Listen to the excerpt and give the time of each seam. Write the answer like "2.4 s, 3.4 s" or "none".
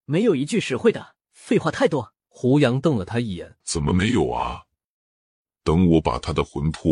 1.2 s, 2.2 s, 3.6 s